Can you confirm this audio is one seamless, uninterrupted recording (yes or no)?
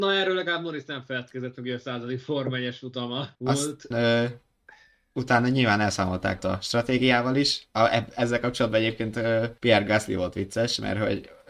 no